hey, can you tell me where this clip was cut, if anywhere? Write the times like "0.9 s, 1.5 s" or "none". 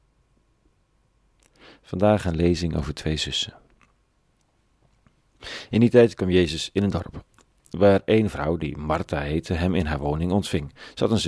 none